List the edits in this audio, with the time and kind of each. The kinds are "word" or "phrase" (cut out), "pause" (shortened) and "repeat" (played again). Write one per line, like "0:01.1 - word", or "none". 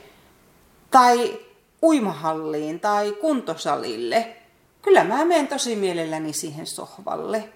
none